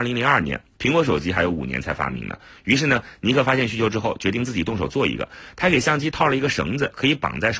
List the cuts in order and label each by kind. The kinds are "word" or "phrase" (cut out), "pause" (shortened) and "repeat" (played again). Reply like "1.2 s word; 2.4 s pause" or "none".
none